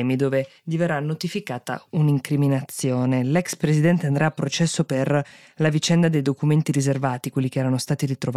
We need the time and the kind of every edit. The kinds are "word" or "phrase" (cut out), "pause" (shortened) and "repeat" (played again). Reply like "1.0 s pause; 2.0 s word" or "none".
none

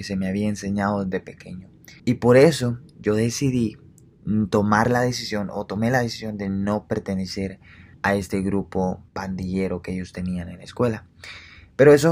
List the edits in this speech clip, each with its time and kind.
2.0 s pause; 7.9 s pause; 9.1 s pause

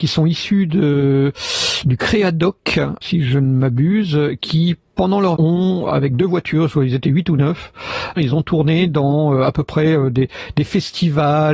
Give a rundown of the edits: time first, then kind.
3.0 s word; 5.4 s word; 5.9 s word; 8.2 s phrase

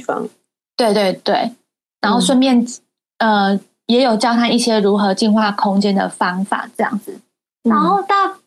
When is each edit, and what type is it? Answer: none

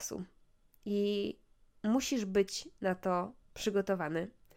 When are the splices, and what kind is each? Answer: 3.4 s pause

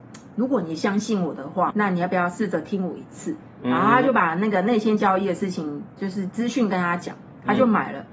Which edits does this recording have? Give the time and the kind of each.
1.7 s word

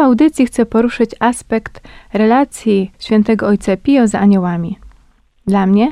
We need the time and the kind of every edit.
none

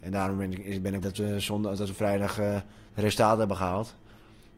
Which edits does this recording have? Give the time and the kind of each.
1.0 s word; 2.9 s pause

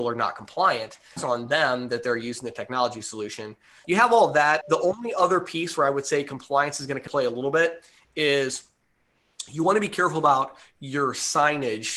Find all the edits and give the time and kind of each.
1.2 s word; 3.8 s word; 4.6 s word; 7.1 s word

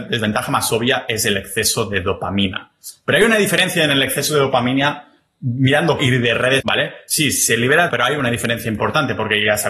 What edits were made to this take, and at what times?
6.0 s word; 6.6 s word; 7.9 s word

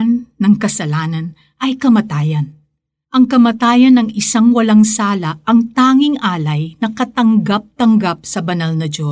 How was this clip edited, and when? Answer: none

